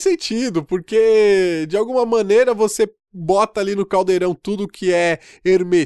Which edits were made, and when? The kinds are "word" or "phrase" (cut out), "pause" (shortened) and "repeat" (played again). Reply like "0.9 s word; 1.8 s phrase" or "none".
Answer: none